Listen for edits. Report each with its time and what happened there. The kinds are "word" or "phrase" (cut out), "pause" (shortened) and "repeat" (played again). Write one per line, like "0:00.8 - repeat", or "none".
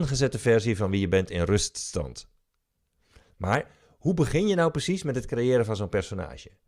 none